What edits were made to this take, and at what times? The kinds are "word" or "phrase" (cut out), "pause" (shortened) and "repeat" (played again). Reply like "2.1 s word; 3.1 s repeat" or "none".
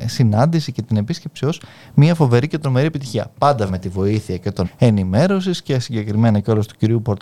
3.7 s word; 4.6 s word